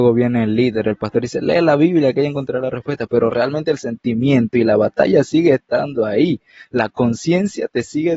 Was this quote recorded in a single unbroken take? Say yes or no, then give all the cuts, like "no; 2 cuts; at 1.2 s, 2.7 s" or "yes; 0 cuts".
yes; 0 cuts